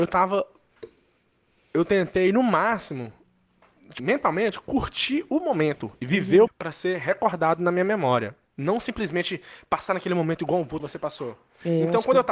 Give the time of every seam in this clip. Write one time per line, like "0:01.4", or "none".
0:04.0
0:06.5
0:10.8